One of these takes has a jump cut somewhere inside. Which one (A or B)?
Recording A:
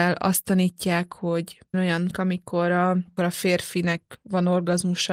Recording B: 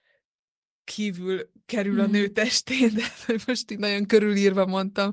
A